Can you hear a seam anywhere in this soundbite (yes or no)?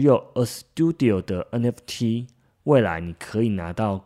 no